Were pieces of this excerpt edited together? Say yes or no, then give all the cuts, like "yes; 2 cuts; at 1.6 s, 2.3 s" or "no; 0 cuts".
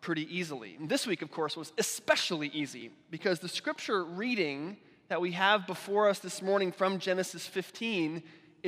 no; 0 cuts